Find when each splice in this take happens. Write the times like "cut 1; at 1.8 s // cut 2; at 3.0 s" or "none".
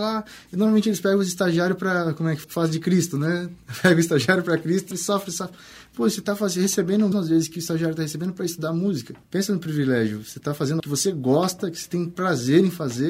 cut 1; at 2.4 s // cut 2; at 4.9 s // cut 3; at 7.1 s // cut 4; at 9.2 s // cut 5; at 10.8 s